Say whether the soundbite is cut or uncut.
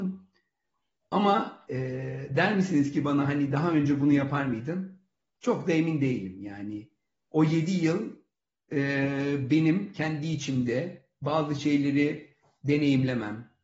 uncut